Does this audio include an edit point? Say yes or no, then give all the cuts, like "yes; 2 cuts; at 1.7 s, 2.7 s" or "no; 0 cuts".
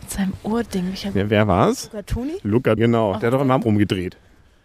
yes; 2 cuts; at 2.8 s, 3.6 s